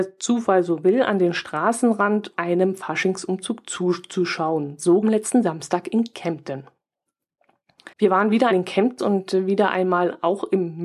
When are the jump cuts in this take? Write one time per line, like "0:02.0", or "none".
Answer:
0:02.4
0:05.0
0:07.9
0:08.5
0:09.0